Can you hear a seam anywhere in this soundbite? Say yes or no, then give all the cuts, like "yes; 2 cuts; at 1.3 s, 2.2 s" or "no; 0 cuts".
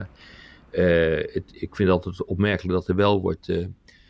no; 0 cuts